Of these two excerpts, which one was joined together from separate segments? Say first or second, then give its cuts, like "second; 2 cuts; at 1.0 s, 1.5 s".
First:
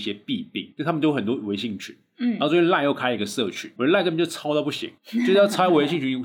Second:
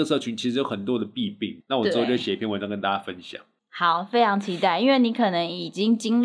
first; 1 cut; at 3.8 s